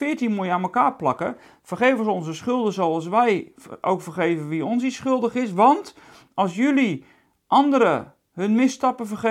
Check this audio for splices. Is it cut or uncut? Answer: uncut